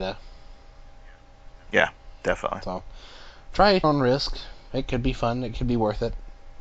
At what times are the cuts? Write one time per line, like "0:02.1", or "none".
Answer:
0:03.8